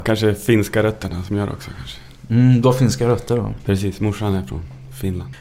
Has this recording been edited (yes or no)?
no